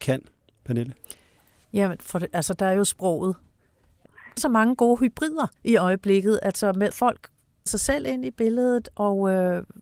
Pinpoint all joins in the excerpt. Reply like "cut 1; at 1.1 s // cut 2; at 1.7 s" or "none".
cut 1; at 4.4 s // cut 2; at 5.6 s // cut 3; at 6.9 s // cut 4; at 7.7 s

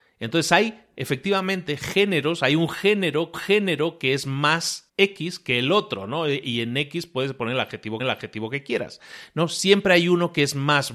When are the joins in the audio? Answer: cut 1; at 3.3 s // cut 2; at 4.9 s // cut 3; at 8.0 s

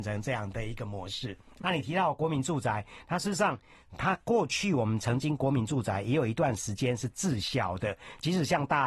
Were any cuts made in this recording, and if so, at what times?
cut 1; at 1.6 s

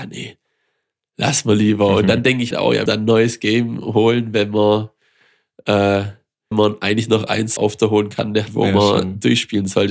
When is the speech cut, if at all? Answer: cut 1; at 2.5 s // cut 2; at 2.9 s // cut 3; at 6.5 s // cut 4; at 7.6 s // cut 5; at 8.5 s

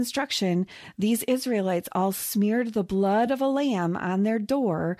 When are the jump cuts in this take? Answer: none

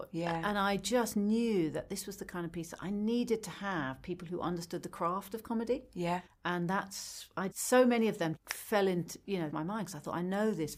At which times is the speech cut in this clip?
cut 1; at 6.3 s // cut 2; at 7.5 s // cut 3; at 8.4 s // cut 4; at 9.5 s

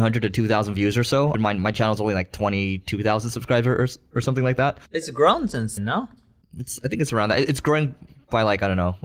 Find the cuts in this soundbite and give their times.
cut 1; at 1.3 s // cut 2; at 4.8 s // cut 3; at 5.8 s

